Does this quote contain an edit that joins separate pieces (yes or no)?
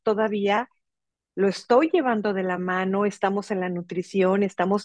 no